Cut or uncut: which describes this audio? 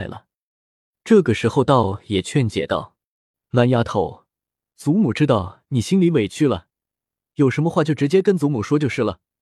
uncut